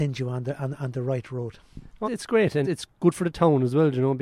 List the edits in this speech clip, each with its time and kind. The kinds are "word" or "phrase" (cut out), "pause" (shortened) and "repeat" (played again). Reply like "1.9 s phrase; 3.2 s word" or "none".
2.0 s word; 2.6 s word